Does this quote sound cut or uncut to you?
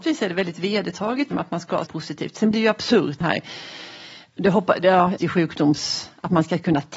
cut